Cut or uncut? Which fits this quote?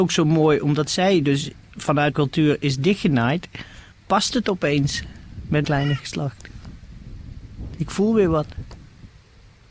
cut